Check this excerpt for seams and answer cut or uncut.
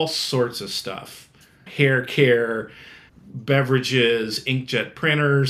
uncut